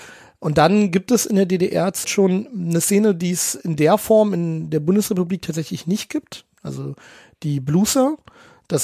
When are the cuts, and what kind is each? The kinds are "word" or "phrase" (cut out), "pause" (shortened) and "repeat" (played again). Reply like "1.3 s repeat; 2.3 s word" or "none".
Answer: 2.0 s phrase